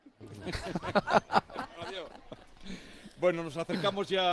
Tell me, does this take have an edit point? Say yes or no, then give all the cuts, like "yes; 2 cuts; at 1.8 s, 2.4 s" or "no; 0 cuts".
no; 0 cuts